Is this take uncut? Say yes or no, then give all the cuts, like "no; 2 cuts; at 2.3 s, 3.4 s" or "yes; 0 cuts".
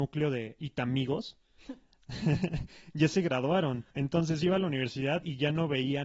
no; 1 cut; at 3.9 s